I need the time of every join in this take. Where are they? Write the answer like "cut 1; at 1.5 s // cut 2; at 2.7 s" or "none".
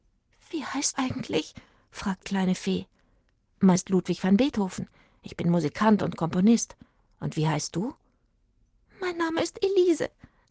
cut 1; at 0.9 s // cut 2; at 2.2 s // cut 3; at 3.8 s